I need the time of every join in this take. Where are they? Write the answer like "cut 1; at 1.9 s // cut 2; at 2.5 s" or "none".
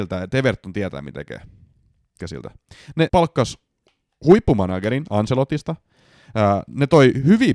cut 1; at 1.1 s // cut 2; at 2.2 s // cut 3; at 3.1 s

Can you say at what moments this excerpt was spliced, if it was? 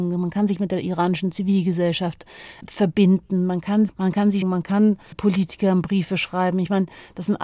cut 1; at 2.6 s // cut 2; at 3.9 s // cut 3; at 4.4 s // cut 4; at 5.1 s

